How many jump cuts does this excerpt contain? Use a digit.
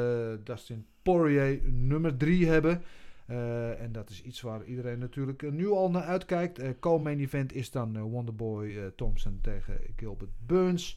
0